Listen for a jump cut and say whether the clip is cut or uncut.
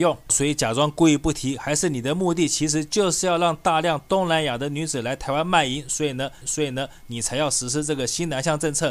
cut